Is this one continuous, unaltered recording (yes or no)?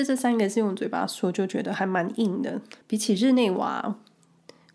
no